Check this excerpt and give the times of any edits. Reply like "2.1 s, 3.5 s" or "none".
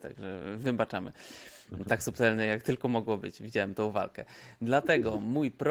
none